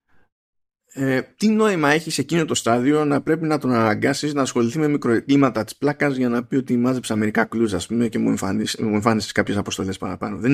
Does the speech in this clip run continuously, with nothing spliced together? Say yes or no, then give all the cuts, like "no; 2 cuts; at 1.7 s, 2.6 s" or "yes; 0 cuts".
yes; 0 cuts